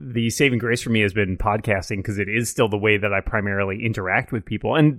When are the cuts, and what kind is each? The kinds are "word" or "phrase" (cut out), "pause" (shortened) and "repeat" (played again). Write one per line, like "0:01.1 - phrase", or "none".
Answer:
none